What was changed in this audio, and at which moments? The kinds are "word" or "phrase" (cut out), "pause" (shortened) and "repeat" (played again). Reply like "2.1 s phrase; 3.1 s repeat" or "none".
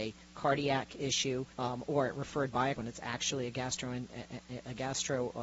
1.5 s pause; 2.8 s word